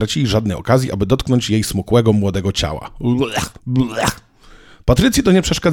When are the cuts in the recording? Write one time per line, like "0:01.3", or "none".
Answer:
0:03.6